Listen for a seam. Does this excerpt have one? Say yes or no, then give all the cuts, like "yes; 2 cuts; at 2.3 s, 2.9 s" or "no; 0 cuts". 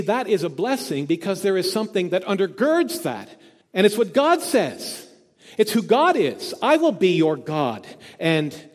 yes; 1 cut; at 3.6 s